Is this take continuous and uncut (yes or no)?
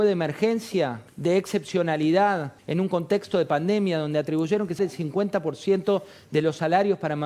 no